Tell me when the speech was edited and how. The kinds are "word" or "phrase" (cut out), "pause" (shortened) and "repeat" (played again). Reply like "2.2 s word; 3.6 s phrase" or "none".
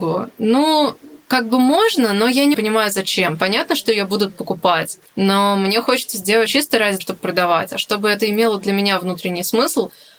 2.5 s word; 5.1 s pause; 6.5 s phrase; 7.0 s word